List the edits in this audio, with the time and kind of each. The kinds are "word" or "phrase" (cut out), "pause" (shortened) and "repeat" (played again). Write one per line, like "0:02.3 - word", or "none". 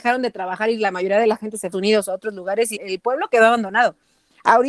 0:01.7 - phrase
0:02.7 - word